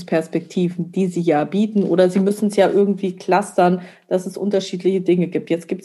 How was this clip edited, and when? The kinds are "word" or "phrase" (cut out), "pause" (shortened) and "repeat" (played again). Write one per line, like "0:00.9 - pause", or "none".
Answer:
none

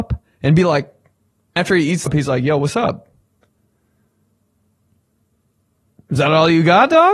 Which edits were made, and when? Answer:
0:01.6 - word
0:02.1 - phrase

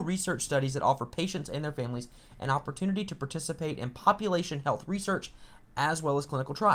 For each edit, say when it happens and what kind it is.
none

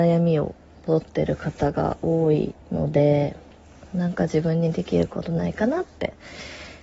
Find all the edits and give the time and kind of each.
0:02.6 - pause
0:03.5 - pause

